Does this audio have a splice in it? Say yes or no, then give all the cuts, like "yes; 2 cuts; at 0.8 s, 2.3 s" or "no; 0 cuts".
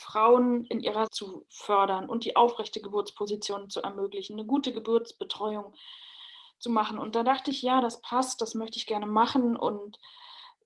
yes; 1 cut; at 1.1 s